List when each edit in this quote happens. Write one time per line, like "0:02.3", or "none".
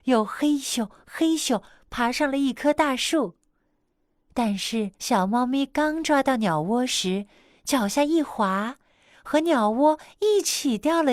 0:04.9